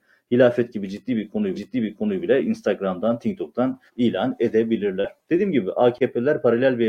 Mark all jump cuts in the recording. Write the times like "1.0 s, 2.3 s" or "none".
1.5 s, 3.9 s